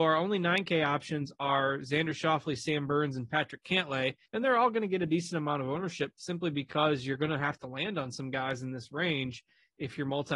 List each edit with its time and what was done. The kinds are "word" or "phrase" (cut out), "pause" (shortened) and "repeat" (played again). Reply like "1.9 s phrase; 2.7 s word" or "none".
4.3 s pause